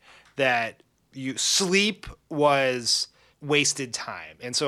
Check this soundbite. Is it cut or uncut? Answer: cut